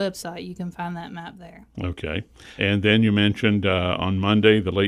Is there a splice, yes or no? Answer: yes